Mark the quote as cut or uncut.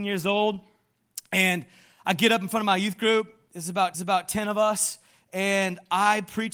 cut